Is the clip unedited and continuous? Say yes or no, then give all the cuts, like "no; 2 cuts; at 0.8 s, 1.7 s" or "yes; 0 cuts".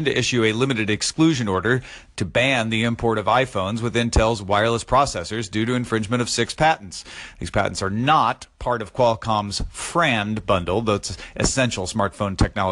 yes; 0 cuts